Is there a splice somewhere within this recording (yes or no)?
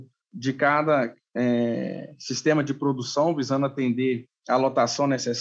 no